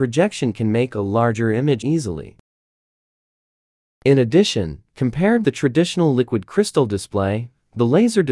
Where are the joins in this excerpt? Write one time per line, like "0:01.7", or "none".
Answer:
0:01.8
0:05.4